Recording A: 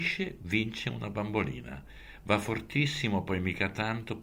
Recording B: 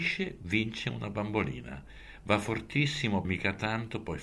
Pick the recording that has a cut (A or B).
B